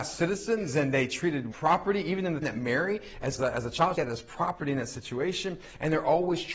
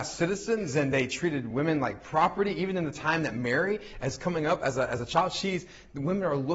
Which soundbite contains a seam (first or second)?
first